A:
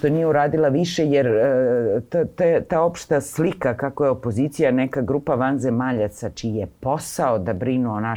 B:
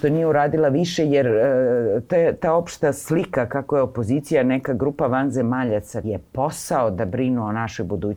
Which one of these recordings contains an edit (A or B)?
B